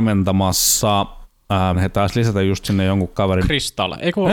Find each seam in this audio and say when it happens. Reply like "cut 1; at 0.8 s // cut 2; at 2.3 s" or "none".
cut 1; at 1.7 s